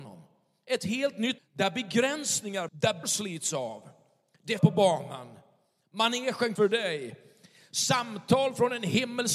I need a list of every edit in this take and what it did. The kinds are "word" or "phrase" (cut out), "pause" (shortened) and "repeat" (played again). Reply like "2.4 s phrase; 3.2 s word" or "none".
1.4 s word; 2.7 s word; 3.0 s word; 4.6 s word; 6.6 s word